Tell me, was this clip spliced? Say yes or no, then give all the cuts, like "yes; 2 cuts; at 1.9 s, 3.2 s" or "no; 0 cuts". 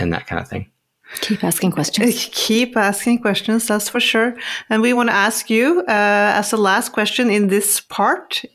no; 0 cuts